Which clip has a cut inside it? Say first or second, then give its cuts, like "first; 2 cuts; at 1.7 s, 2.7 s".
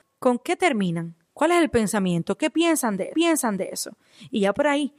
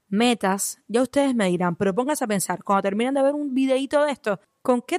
first; 2 cuts; at 1.2 s, 3.1 s